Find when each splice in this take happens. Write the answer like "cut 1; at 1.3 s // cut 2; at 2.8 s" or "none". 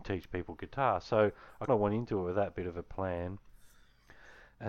cut 1; at 1.7 s